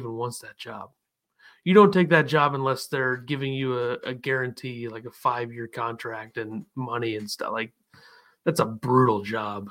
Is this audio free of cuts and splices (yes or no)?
yes